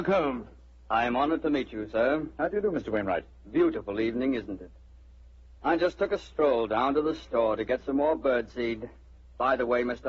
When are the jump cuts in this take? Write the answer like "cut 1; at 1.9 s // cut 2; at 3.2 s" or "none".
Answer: none